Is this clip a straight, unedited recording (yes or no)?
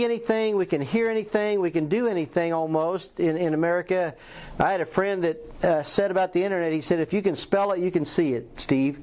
yes